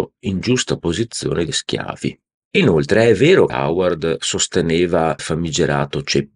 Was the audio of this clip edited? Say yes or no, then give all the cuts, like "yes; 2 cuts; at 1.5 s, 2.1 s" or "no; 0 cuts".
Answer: yes; 3 cuts; at 1.5 s, 3.5 s, 5.2 s